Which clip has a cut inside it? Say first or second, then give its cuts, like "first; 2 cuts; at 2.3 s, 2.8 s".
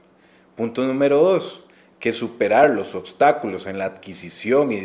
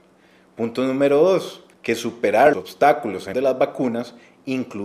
second; 3 cuts; at 1.7 s, 2.5 s, 3.3 s